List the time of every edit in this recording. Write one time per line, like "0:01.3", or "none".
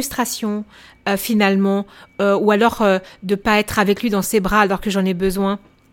none